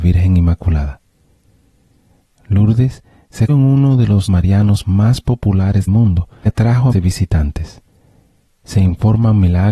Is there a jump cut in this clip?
yes; 5 cuts; at 3.5 s, 4.3 s, 5.9 s, 6.5 s, 6.9 s

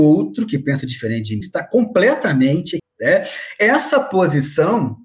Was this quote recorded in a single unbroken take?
no; 2 cuts; at 1.4 s, 2.8 s

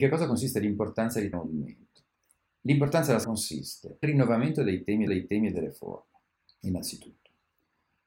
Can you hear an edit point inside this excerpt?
yes; 5 cuts; at 1.3 s, 3.2 s, 4.0 s, 5.1 s, 6.3 s

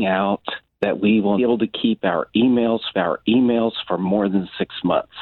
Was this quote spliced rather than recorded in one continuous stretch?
yes; 2 cuts; at 1.4 s, 2.9 s

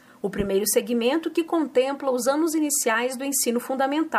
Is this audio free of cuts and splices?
yes; 0 cuts

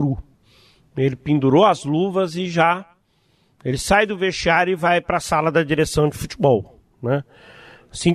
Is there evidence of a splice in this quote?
no; 0 cuts

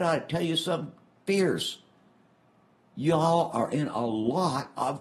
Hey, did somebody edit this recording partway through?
no; 0 cuts

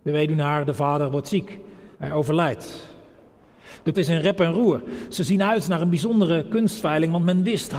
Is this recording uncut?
no; 2 cuts; at 1.9 s, 3.9 s

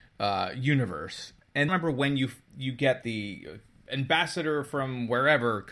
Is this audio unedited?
no; 3 cuts; at 1.7 s, 2.5 s, 3.0 s

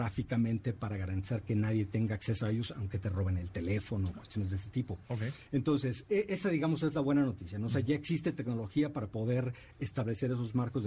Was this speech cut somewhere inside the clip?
no; 0 cuts

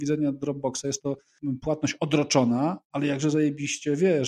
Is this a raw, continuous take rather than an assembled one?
yes; 0 cuts

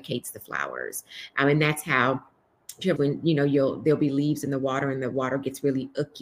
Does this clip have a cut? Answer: yes; 1 cut; at 3.0 s

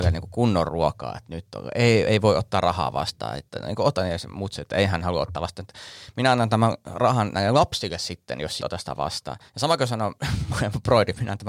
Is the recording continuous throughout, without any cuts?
no; 2 cuts; at 8.6 s, 9.5 s

